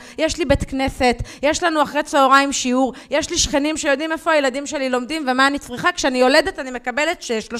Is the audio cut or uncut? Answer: uncut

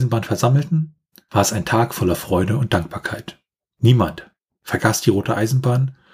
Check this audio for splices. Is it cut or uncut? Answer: uncut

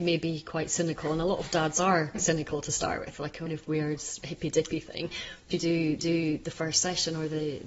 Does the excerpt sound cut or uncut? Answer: cut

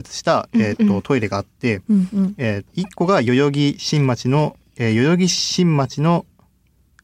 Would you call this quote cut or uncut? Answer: cut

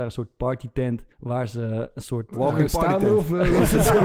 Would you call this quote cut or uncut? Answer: cut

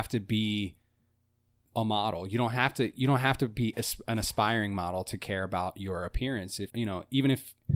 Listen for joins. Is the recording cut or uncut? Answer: cut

